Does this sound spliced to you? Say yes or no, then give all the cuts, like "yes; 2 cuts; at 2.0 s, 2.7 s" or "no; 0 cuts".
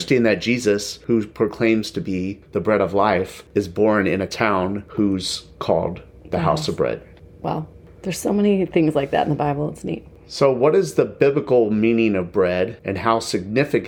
no; 0 cuts